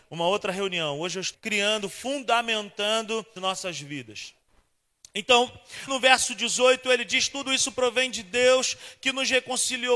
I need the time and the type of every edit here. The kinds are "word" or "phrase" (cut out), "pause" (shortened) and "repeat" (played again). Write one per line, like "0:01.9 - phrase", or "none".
0:01.3 - word
0:03.4 - word
0:05.9 - word

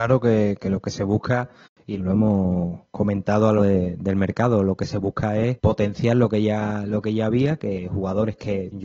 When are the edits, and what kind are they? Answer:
0:02.0 - word
0:03.6 - word

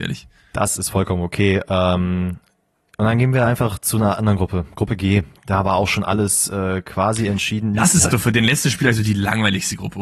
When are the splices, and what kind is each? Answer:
0:08.1 - word

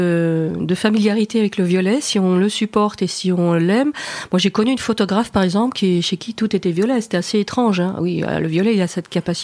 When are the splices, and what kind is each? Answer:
none

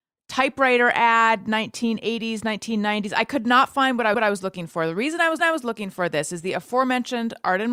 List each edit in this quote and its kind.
0:04.1 - repeat
0:05.4 - repeat

